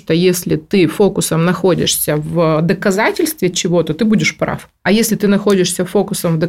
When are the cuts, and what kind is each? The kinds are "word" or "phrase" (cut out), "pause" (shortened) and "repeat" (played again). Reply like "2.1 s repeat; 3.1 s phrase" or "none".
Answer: none